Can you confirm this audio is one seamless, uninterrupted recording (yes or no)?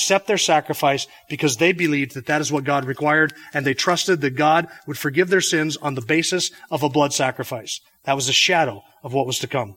yes